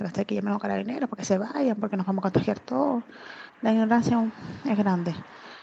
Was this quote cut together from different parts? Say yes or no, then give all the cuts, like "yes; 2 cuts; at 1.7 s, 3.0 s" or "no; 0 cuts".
yes; 1 cut; at 3.5 s